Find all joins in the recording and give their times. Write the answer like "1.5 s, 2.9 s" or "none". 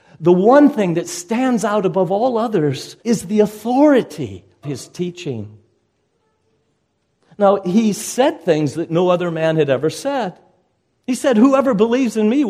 3.0 s, 4.6 s